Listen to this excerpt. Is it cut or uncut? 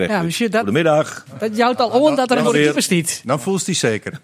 cut